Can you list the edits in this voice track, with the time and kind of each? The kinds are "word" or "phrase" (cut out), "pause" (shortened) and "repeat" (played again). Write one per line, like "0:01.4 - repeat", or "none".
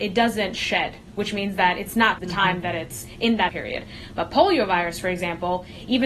0:02.2 - word
0:03.5 - word